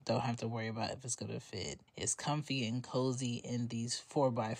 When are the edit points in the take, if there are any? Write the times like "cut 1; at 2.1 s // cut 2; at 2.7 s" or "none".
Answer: cut 1; at 1.9 s